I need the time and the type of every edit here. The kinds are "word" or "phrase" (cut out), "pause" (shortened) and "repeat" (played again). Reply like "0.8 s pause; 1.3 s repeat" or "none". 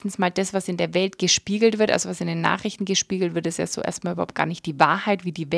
none